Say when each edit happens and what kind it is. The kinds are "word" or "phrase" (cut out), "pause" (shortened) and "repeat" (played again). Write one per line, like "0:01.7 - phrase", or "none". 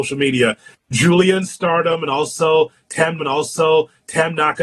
0:03.2 - repeat

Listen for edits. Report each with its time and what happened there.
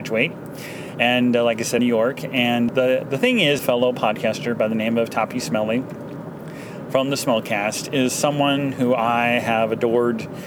0:01.8 - phrase
0:02.7 - word
0:03.6 - phrase

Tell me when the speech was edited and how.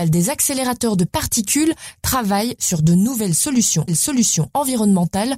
0:03.9 - repeat

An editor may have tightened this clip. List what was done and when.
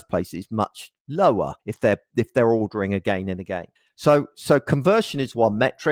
0:01.6 - pause
0:03.8 - pause

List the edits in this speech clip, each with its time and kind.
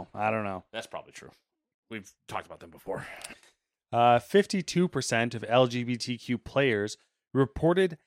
none

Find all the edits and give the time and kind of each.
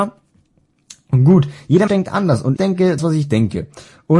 0:01.9 - word
0:02.6 - word
0:03.0 - word

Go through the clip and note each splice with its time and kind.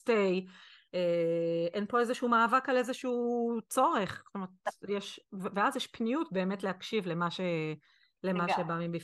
none

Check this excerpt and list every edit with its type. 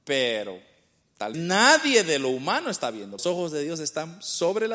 0:01.3 - word
0:03.2 - phrase

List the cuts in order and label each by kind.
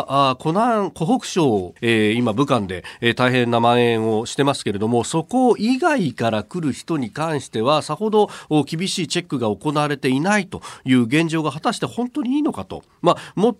0:01.8 - word

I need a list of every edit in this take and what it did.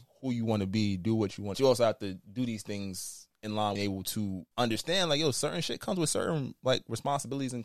0:01.5 - phrase
0:03.8 - phrase
0:04.5 - pause

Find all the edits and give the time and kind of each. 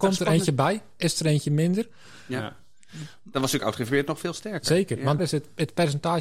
0:05.2 - word

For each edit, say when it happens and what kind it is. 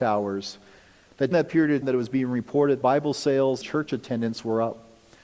0:01.3 - word
0:01.8 - word
0:02.8 - word
0:03.6 - word

